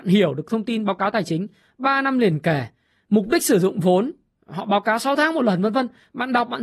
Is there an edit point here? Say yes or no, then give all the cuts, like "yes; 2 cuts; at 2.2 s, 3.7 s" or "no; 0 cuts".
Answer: no; 0 cuts